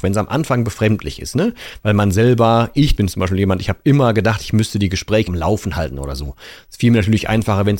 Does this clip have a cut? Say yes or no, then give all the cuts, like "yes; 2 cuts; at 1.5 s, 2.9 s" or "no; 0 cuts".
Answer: yes; 2 cuts; at 3.0 s, 5.3 s